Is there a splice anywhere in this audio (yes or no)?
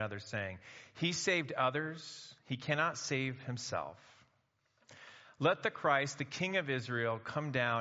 no